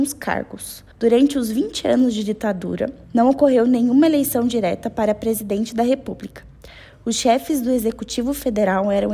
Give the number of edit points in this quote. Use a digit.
2